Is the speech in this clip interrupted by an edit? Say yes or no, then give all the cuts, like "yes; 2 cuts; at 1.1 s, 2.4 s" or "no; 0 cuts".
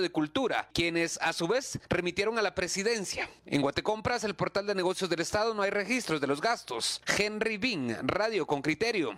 no; 0 cuts